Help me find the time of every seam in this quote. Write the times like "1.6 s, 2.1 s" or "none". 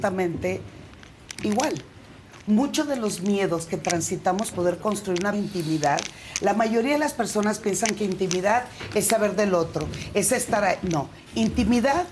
4.5 s, 5.3 s